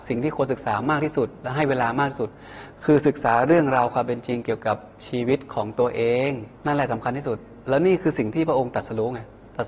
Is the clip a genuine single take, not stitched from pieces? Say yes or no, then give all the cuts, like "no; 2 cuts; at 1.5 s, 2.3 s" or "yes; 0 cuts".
no; 1 cut; at 6.6 s